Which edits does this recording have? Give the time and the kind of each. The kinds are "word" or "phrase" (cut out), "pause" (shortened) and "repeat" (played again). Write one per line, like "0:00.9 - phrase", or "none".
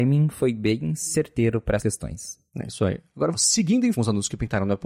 0:01.8 - word
0:02.5 - pause
0:03.3 - phrase
0:03.9 - word